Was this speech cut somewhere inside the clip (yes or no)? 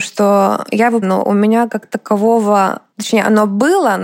yes